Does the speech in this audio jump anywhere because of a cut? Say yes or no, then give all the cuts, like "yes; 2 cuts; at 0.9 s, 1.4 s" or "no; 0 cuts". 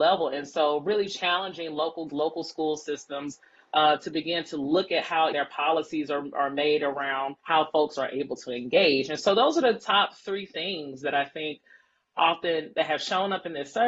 yes; 3 cuts; at 2.1 s, 5.3 s, 7.4 s